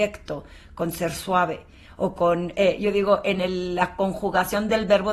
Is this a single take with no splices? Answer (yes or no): yes